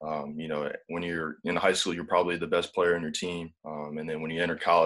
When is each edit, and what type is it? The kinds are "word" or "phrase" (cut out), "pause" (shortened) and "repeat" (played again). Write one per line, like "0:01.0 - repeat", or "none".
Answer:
0:03.6 - pause